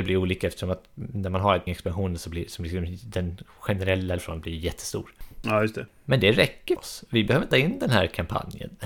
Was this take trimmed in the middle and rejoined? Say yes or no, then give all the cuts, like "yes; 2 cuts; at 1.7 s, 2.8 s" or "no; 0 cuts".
yes; 4 cuts; at 1.7 s, 4.2 s, 6.8 s, 7.5 s